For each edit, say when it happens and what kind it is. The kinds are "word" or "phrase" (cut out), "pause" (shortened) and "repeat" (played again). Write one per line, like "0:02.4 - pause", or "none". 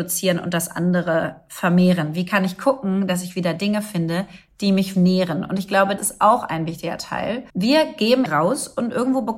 0:04.9 - word
0:06.0 - word
0:07.5 - pause
0:08.3 - word